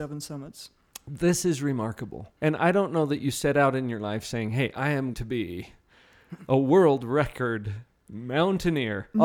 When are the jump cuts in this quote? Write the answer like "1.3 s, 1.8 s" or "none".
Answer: 2.4 s, 5.1 s